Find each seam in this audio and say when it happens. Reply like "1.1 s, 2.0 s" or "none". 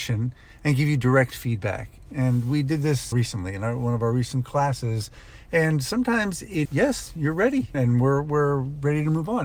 3.1 s, 6.7 s, 7.7 s